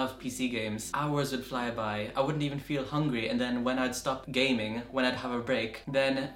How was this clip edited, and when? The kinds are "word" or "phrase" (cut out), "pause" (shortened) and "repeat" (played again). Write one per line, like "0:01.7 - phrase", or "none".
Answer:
none